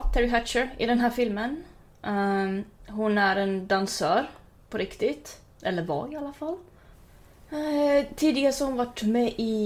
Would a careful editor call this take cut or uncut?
uncut